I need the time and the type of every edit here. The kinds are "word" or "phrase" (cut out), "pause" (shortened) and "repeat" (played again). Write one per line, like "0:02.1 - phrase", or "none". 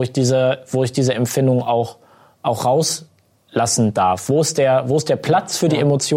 none